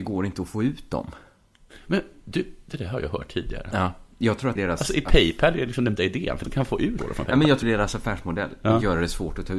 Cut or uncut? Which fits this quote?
cut